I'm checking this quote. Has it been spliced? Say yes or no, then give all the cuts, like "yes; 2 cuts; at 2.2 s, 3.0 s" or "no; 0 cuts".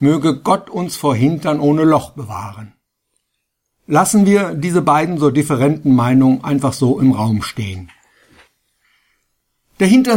no; 0 cuts